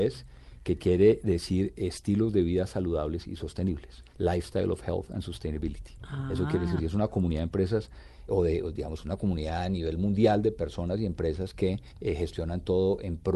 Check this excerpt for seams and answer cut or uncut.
cut